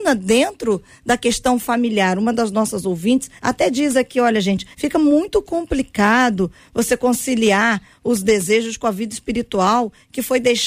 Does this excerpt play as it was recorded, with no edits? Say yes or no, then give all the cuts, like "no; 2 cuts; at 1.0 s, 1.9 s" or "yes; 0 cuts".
no; 2 cuts; at 3.4 s, 4.7 s